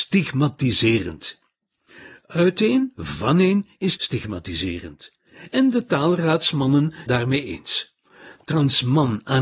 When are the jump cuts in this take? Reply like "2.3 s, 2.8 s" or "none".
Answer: 4.0 s, 7.1 s